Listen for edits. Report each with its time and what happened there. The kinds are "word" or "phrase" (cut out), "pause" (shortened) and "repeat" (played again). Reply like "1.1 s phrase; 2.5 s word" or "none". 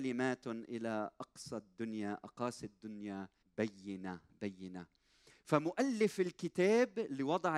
3.4 s pause